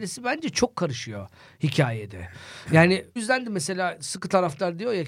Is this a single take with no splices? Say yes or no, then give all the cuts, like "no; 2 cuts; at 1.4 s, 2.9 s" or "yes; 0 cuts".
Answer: no; 1 cut; at 3.2 s